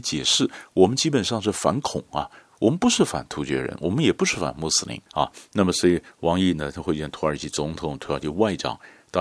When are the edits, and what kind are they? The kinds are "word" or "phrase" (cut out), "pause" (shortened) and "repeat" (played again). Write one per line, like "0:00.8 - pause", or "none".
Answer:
0:05.1 - pause